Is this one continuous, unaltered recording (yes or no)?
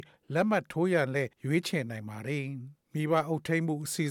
no